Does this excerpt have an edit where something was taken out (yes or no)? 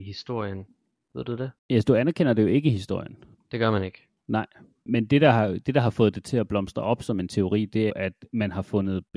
yes